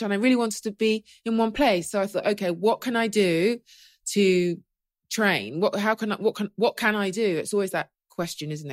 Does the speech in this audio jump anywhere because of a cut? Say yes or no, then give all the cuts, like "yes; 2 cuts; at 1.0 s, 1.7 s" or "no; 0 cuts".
no; 0 cuts